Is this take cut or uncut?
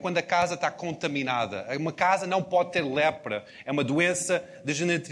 uncut